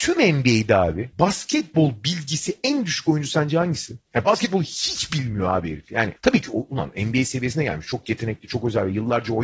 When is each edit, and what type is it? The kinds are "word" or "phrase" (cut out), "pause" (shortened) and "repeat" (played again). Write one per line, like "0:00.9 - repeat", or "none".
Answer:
0:01.1 - pause
0:06.2 - pause